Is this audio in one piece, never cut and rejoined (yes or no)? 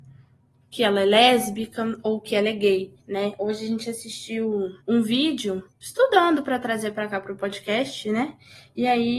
no